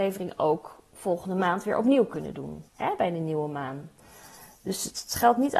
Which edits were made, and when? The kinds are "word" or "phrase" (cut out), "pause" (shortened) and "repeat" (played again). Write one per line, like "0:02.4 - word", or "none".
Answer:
0:02.7 - pause